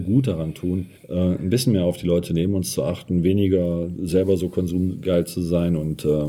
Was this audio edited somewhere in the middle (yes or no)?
yes